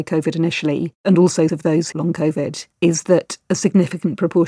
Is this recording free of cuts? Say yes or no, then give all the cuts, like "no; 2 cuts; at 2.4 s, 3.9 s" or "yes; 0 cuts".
no; 3 cuts; at 1.5 s, 1.9 s, 2.7 s